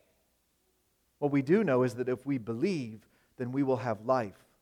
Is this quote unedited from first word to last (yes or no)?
yes